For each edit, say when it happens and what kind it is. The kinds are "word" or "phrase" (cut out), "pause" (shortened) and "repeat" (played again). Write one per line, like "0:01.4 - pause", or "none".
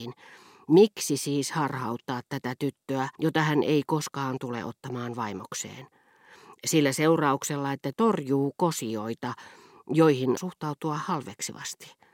0:03.2 - pause
0:07.9 - phrase
0:10.4 - word